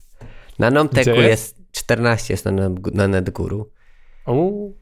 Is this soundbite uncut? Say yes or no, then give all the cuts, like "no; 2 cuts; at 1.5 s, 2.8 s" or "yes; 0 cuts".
yes; 0 cuts